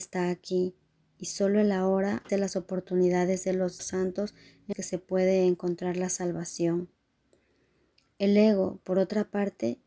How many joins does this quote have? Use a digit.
3